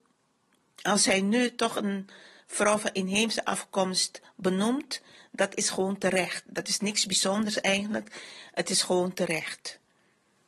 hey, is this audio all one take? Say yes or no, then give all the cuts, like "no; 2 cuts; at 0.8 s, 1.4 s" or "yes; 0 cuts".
yes; 0 cuts